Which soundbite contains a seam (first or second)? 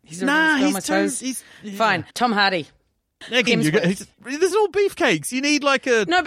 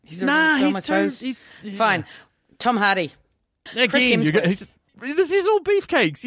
first